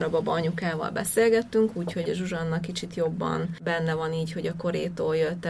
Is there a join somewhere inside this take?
yes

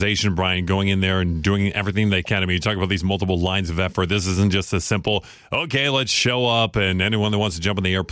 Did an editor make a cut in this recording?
no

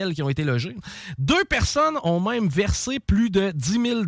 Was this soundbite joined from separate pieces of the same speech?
no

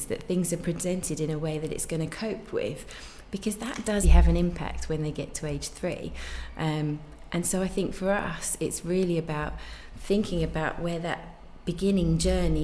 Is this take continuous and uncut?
no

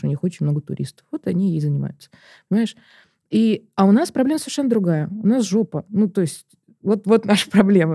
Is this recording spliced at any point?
no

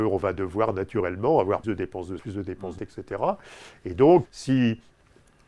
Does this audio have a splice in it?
yes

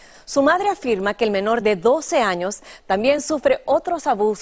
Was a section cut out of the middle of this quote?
no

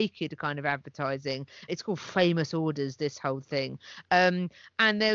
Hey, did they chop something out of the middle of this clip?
yes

